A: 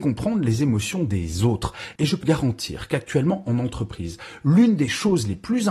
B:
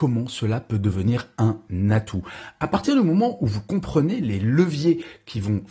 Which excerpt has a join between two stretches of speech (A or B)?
A